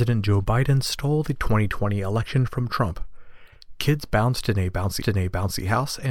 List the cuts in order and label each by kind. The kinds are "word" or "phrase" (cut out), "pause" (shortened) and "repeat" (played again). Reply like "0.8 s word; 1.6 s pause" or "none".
5.0 s repeat